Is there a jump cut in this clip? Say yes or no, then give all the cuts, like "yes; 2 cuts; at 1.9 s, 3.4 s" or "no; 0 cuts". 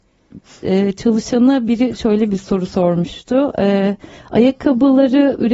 no; 0 cuts